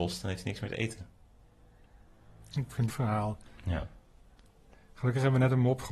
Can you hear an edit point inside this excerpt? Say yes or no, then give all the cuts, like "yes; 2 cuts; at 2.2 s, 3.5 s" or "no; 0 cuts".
yes; 1 cut; at 2.9 s